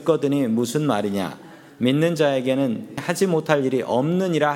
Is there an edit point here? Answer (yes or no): yes